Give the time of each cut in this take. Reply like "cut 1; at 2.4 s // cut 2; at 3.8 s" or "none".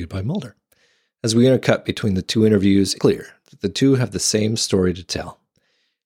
cut 1; at 3.0 s